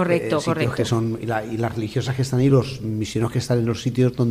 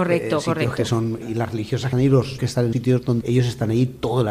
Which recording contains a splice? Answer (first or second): second